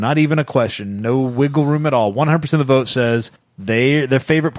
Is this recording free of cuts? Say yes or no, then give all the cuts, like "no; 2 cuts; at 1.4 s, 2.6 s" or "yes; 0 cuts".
no; 1 cut; at 3.4 s